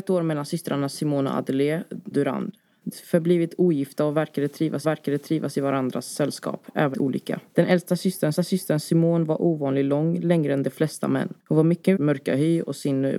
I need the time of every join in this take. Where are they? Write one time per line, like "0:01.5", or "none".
0:02.1
0:02.9
0:04.8
0:06.9
0:07.5
0:08.3
0:11.4
0:12.0